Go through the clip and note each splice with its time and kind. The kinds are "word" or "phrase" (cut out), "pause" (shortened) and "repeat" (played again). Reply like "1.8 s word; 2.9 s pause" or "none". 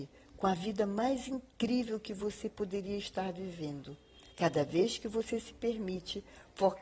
4.3 s pause